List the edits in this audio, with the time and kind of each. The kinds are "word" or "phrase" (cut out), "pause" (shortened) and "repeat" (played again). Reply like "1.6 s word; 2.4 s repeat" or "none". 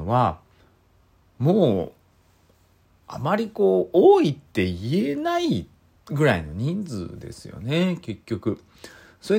6.0 s pause